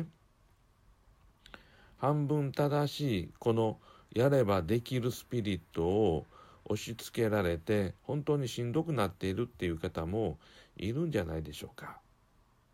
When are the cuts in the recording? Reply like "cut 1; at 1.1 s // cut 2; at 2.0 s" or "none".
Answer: cut 1; at 8.0 s